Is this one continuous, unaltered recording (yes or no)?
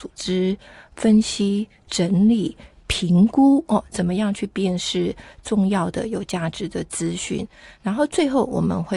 yes